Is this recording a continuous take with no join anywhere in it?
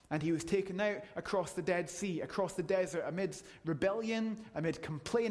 yes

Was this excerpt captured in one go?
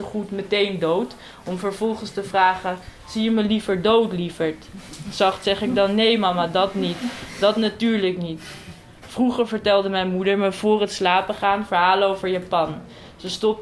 yes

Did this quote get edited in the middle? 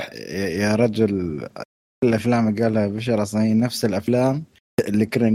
no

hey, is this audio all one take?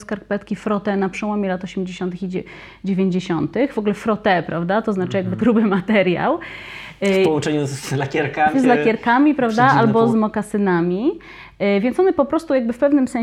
no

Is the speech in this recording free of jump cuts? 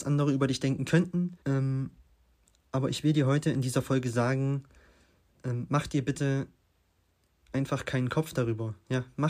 no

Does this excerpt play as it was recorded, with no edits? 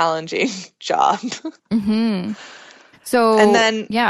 yes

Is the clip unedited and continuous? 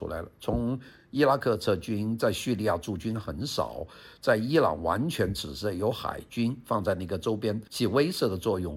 no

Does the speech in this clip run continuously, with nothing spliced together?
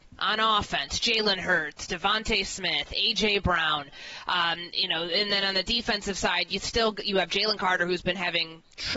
yes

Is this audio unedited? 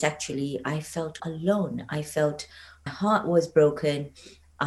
no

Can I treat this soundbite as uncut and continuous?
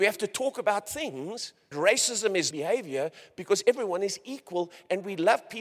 no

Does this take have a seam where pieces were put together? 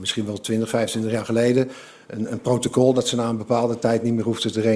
no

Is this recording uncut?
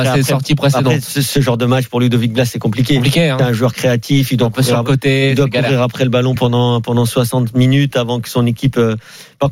yes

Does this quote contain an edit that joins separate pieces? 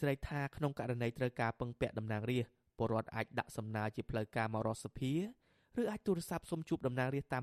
no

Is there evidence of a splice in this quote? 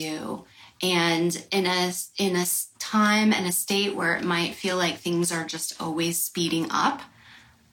no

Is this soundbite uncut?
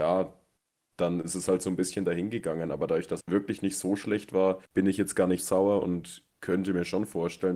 no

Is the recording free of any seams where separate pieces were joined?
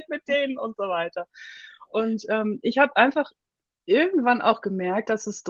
yes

